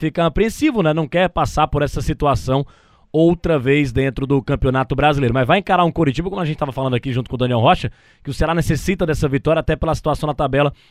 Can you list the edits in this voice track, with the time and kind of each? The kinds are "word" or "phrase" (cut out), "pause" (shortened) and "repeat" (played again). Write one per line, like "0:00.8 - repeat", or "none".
none